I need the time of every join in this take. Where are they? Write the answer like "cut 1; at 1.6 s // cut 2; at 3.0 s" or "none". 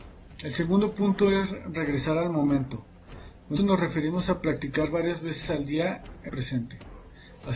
cut 1; at 3.6 s // cut 2; at 6.3 s